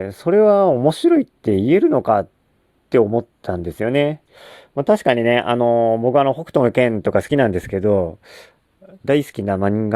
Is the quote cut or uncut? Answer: uncut